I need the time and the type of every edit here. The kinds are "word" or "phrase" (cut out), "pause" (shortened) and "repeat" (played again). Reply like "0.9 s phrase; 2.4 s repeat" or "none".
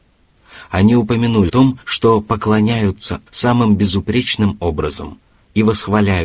1.5 s word; 1.8 s pause; 3.3 s word